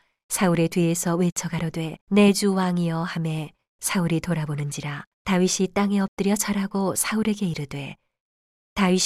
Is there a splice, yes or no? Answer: yes